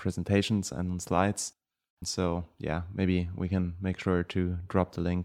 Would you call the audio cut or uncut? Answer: uncut